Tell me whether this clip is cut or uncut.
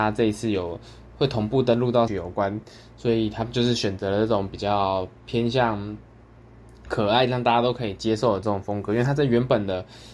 cut